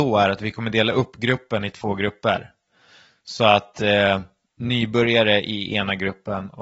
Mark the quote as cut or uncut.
uncut